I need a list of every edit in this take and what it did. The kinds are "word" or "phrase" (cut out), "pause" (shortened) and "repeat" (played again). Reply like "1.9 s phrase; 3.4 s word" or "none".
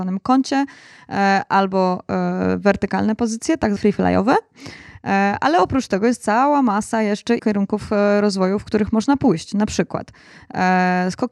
3.8 s word; 7.4 s word